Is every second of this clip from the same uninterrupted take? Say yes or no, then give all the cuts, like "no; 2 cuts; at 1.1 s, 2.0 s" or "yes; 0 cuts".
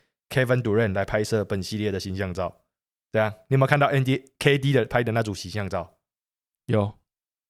yes; 0 cuts